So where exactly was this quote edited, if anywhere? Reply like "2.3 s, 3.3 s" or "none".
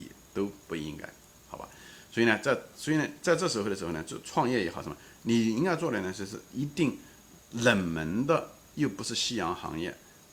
none